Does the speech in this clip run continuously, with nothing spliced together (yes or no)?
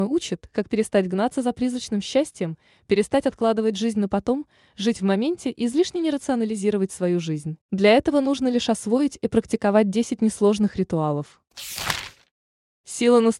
no